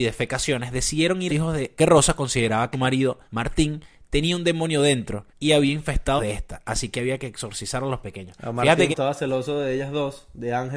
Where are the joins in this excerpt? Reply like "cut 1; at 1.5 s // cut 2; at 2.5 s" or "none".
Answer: cut 1; at 1.3 s // cut 2; at 1.8 s // cut 3; at 2.7 s // cut 4; at 3.3 s // cut 5; at 5.3 s // cut 6; at 6.2 s // cut 7; at 8.9 s